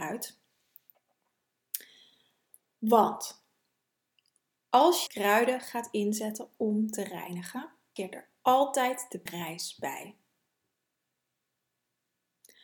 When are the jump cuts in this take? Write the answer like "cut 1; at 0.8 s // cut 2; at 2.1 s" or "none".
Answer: cut 1; at 5.1 s // cut 2; at 8.0 s // cut 3; at 9.3 s